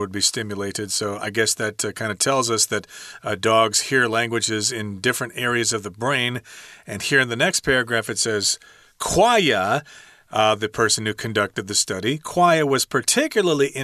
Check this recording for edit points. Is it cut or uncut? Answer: uncut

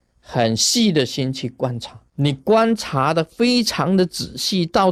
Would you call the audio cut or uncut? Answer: cut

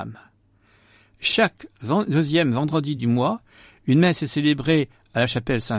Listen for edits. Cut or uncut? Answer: uncut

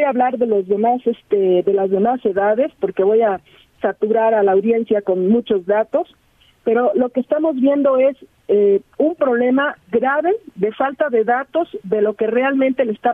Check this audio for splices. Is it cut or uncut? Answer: uncut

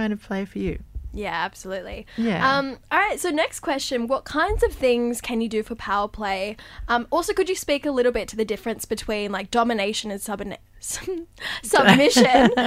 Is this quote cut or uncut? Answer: uncut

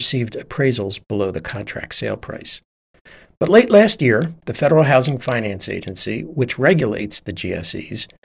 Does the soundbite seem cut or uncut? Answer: uncut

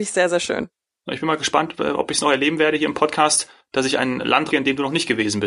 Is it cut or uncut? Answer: cut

